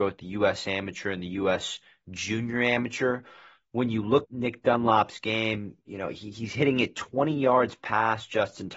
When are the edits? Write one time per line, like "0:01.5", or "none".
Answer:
0:04.2